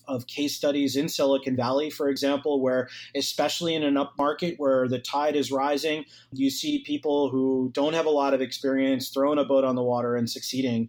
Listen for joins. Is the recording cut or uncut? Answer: uncut